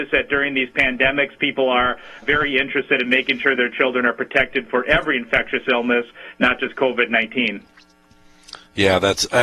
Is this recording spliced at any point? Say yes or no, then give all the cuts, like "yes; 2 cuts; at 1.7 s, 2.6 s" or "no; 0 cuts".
yes; 1 cut; at 2.2 s